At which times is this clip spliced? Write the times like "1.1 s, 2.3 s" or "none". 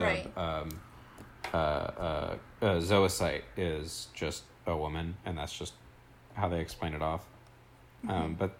none